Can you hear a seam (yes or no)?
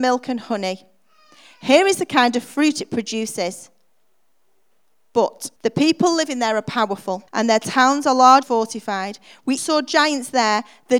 yes